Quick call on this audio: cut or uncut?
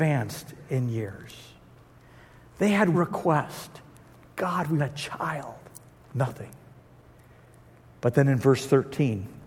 cut